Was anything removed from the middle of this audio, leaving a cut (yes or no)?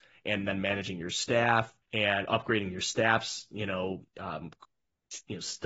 yes